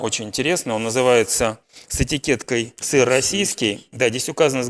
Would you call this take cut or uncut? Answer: cut